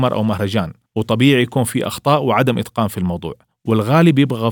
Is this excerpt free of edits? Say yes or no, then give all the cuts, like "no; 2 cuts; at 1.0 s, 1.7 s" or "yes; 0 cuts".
yes; 0 cuts